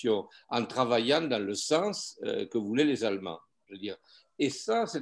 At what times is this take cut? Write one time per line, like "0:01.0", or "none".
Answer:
none